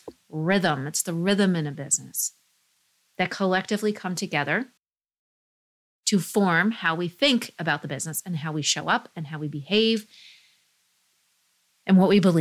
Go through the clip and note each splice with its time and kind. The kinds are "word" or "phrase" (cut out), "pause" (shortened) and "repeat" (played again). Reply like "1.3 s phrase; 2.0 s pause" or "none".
none